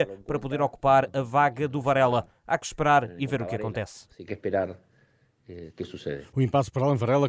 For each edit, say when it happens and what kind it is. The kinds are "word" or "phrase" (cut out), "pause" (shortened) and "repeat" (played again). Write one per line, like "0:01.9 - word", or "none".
0:04.3 - word